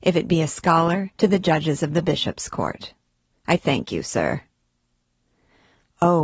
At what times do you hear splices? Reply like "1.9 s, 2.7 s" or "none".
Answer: 1.1 s

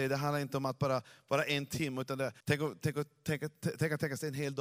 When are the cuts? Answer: 2.4 s

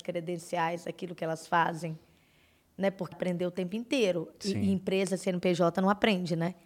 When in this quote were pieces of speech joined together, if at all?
3.1 s

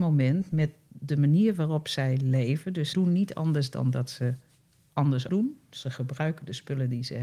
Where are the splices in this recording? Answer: 2.9 s, 5.3 s

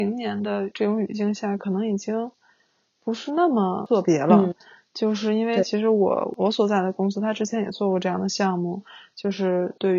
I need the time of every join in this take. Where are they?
none

